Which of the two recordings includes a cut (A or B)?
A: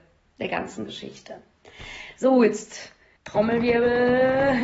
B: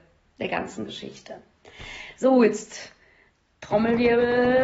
A